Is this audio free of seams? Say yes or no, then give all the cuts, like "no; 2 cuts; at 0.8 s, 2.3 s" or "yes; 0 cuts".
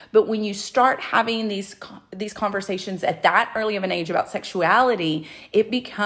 yes; 0 cuts